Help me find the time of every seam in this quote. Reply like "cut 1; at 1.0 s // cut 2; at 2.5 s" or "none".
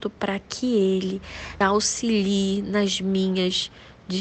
cut 1; at 1.6 s

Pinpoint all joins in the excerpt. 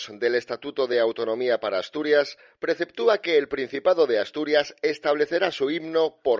none

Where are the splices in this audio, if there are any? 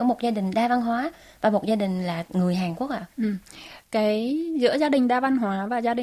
none

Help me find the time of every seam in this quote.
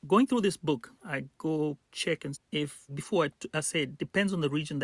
cut 1; at 1.0 s // cut 2; at 1.8 s // cut 3; at 2.3 s // cut 4; at 2.9 s

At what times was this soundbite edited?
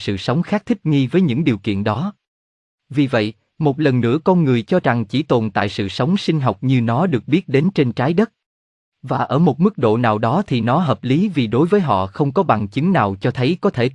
none

